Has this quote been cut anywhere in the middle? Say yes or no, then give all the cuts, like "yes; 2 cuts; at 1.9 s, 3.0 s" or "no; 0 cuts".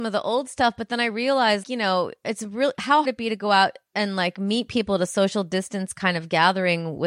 yes; 2 cuts; at 1.6 s, 3.0 s